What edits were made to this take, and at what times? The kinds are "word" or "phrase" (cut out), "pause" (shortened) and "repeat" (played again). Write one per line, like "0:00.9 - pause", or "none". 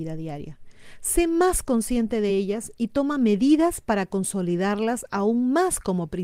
none